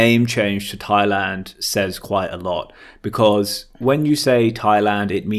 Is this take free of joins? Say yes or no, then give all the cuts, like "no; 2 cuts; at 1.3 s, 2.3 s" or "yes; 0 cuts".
yes; 0 cuts